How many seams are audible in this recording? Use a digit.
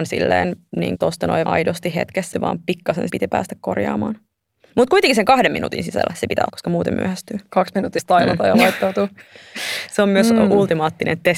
6